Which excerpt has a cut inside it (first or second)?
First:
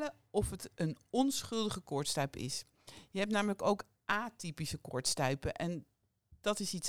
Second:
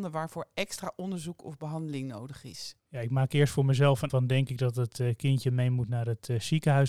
second